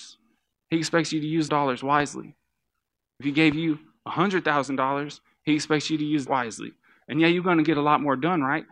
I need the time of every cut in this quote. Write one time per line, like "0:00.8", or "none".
0:01.5
0:06.3